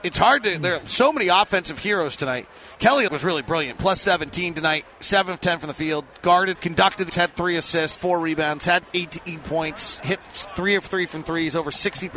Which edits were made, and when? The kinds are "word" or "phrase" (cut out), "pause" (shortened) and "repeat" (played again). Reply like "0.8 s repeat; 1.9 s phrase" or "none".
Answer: 3.1 s word; 6.5 s word; 7.1 s word; 7.9 s word